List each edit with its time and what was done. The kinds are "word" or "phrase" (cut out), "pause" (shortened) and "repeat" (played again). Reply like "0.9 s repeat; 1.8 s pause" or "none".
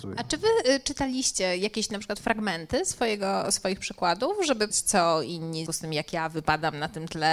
4.7 s word; 5.7 s phrase